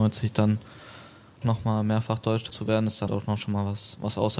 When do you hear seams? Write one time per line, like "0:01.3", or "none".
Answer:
0:01.4
0:02.5
0:03.1